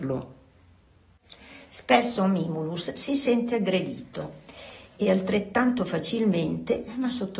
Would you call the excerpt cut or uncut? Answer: uncut